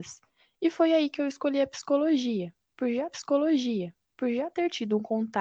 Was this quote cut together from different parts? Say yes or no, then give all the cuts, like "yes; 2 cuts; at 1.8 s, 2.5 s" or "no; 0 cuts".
yes; 1 cut; at 3.1 s